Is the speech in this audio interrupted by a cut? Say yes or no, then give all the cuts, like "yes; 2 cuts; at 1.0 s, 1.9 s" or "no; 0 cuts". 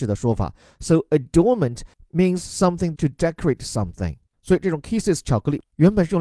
yes; 1 cut; at 3.0 s